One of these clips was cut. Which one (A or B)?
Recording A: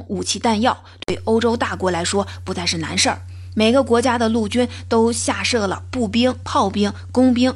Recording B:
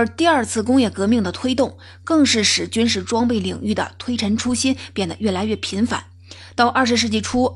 A